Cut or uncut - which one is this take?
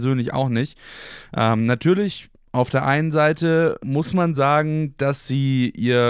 uncut